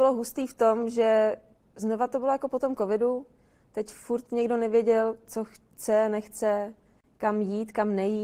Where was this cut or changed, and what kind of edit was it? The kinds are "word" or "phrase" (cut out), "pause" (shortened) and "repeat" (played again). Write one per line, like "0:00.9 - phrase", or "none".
0:01.6 - pause